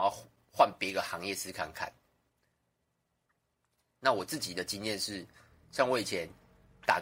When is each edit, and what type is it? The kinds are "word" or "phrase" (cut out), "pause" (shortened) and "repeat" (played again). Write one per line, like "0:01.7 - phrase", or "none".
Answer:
none

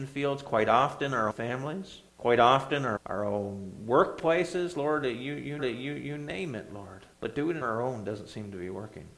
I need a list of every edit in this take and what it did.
0:01.3 - word
0:02.1 - pause
0:03.0 - word
0:05.6 - repeat
0:07.1 - pause
0:07.6 - word

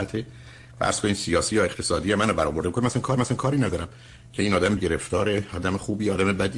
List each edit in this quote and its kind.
0:03.2 - repeat
0:04.8 - word

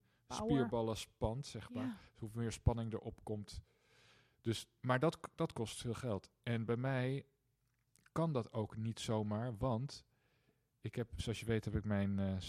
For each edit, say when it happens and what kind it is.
none

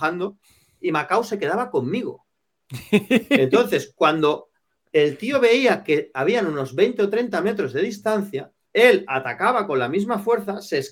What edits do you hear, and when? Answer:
none

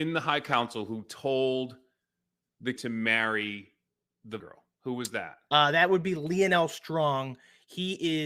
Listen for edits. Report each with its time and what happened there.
0:02.8 - word
0:04.4 - word

